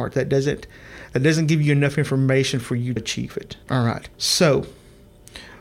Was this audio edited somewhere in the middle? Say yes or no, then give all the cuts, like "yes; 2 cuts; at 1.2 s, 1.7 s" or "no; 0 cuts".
yes; 3 cuts; at 3.0 s, 3.6 s, 4.1 s